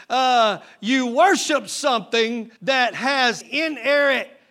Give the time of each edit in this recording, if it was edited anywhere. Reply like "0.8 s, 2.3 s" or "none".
2.6 s, 3.4 s

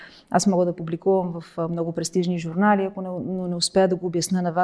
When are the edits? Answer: none

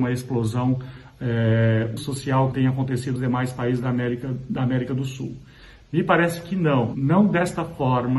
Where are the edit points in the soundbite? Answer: 2.0 s, 2.5 s, 3.2 s

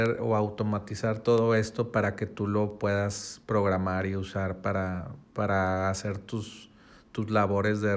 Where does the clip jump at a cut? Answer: 5.2 s

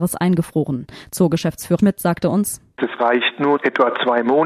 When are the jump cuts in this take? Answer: 1.8 s, 3.0 s, 3.6 s

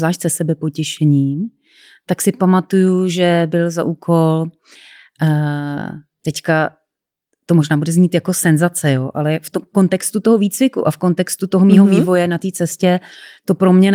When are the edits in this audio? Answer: none

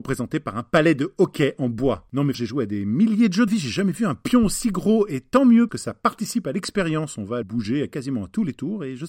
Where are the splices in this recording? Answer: 2.3 s, 3.5 s, 5.7 s, 7.4 s

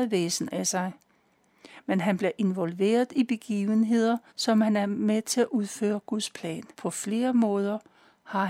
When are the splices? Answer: 4.3 s, 6.7 s

